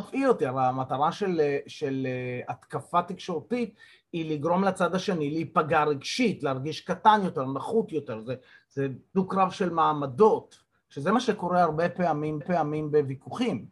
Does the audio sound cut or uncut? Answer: cut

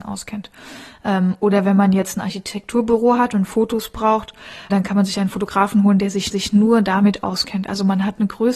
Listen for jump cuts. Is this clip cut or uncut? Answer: cut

